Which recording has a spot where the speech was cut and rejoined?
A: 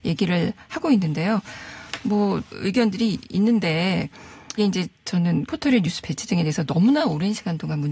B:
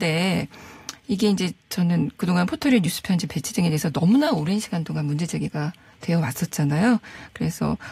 A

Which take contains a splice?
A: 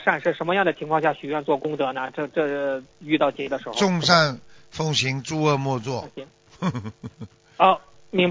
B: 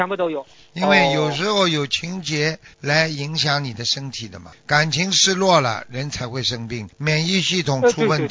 B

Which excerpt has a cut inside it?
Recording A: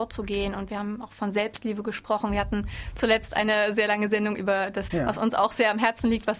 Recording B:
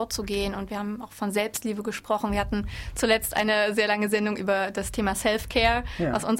A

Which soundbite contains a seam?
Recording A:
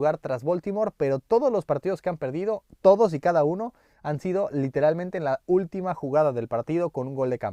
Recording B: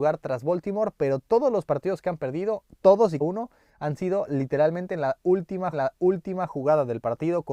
B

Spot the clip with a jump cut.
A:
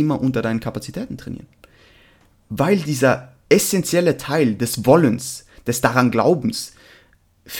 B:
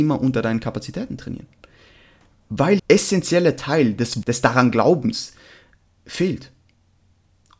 B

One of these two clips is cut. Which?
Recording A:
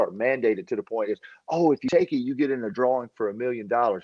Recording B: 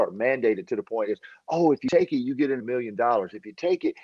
B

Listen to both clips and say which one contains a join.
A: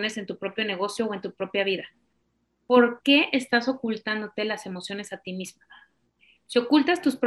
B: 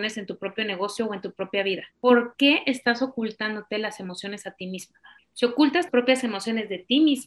B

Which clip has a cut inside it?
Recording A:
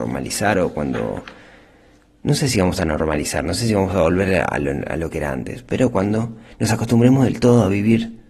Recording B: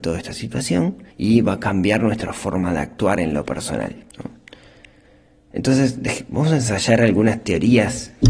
B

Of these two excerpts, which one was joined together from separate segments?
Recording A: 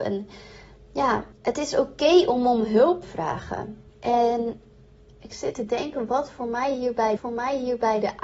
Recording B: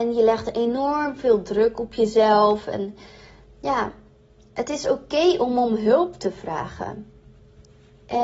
A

